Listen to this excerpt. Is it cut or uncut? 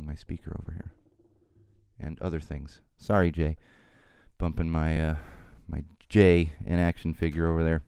uncut